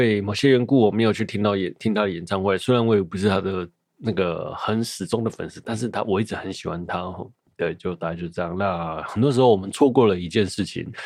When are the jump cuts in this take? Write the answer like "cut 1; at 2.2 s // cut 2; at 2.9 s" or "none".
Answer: none

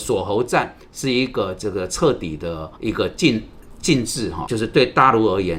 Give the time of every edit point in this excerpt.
cut 1; at 2.8 s // cut 2; at 4.5 s

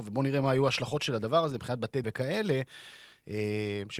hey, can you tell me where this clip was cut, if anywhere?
cut 1; at 2.0 s

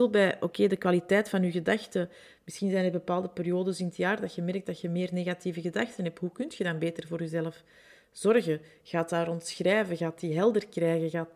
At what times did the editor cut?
none

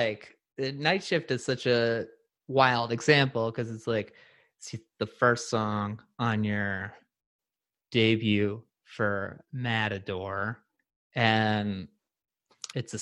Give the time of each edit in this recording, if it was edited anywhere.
none

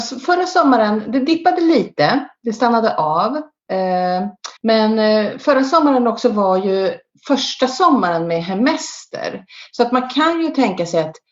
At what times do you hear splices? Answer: cut 1; at 4.6 s

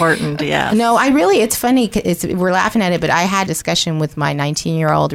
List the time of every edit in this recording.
cut 1; at 3.5 s

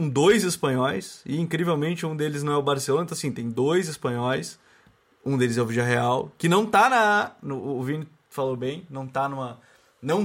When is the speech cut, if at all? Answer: none

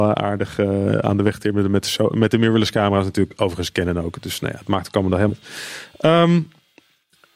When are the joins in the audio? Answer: cut 1; at 5.3 s

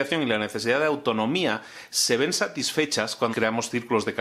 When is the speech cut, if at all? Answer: cut 1; at 3.3 s

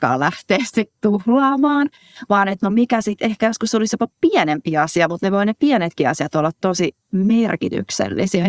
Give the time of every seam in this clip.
none

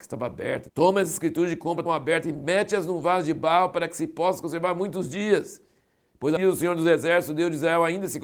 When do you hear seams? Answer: cut 1; at 1.9 s // cut 2; at 6.4 s

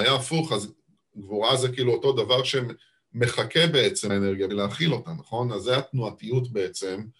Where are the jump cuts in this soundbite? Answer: cut 1; at 4.1 s // cut 2; at 4.5 s

